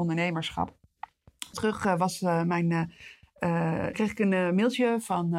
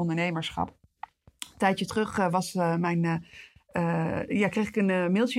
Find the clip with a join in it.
first; 2 cuts; at 1.5 s, 3.9 s

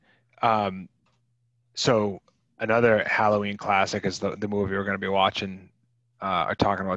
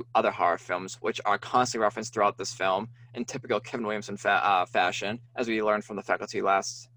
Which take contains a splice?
second; 1 cut; at 5.2 s

